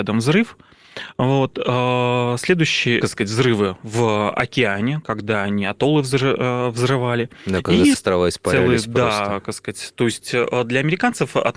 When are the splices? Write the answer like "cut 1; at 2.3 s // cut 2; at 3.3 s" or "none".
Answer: cut 1; at 3.0 s // cut 2; at 7.9 s